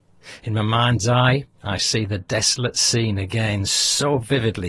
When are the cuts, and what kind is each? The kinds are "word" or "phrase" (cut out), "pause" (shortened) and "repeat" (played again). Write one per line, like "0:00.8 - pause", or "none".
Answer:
0:01.5 - pause